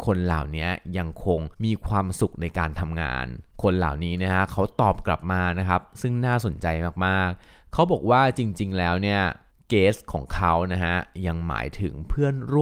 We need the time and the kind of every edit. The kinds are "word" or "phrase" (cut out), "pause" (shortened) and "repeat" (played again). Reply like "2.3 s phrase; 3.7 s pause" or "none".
1.5 s pause; 3.5 s pause; 9.5 s pause